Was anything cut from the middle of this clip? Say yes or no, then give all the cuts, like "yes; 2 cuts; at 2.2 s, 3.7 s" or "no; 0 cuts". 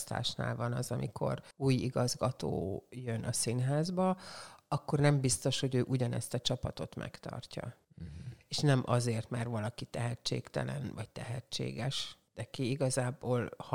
yes; 3 cuts; at 1.5 s, 7.8 s, 12.3 s